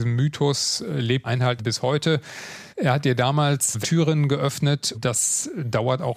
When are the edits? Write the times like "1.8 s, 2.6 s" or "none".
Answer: 1.2 s, 1.6 s, 2.7 s, 3.8 s, 4.9 s